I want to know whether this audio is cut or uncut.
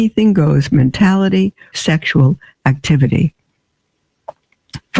cut